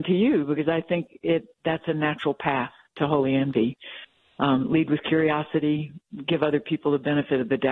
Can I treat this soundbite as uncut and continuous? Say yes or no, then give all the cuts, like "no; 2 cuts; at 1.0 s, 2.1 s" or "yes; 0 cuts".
yes; 0 cuts